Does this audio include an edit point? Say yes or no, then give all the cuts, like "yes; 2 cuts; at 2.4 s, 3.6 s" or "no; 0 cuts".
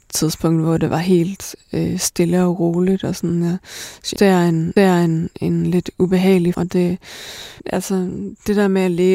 yes; 4 cuts; at 4.2 s, 4.8 s, 6.5 s, 7.6 s